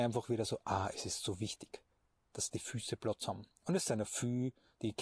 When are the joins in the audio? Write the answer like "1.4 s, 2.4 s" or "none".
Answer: none